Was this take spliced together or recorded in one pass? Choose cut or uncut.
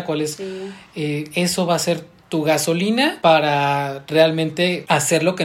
uncut